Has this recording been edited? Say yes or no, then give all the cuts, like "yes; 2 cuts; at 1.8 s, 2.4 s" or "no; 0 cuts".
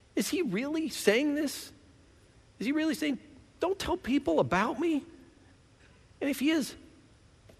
no; 0 cuts